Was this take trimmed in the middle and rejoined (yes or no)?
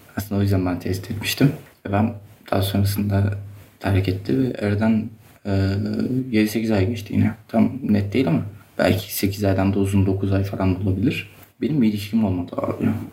no